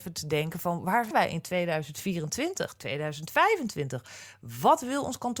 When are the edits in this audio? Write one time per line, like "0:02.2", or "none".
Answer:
0:01.1